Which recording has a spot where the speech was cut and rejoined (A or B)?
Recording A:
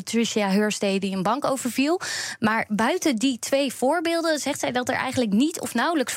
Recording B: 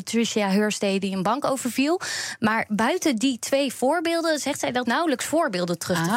B